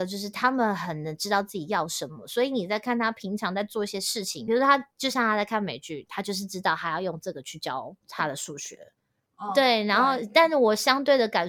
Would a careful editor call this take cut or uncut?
uncut